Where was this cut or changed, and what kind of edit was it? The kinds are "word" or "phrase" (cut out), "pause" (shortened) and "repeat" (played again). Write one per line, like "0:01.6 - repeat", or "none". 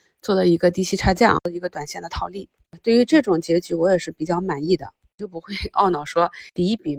0:01.4 - word